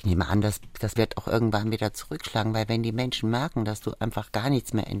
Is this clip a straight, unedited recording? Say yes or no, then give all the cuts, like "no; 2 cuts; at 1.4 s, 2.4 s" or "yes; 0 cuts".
no; 1 cut; at 1.0 s